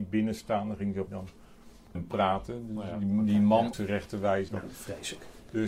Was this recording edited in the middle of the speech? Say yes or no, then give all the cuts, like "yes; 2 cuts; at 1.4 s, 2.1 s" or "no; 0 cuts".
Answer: yes; 4 cuts; at 1.1 s, 1.9 s, 3.7 s, 4.5 s